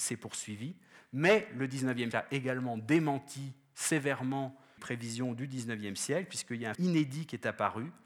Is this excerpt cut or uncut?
cut